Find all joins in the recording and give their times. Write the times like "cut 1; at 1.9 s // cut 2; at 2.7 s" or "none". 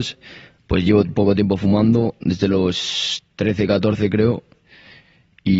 none